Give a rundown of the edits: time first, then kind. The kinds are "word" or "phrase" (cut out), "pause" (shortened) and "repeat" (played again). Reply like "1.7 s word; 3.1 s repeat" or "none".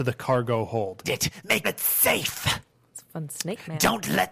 1.0 s word; 1.6 s word